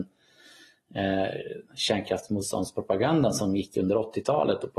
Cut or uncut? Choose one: uncut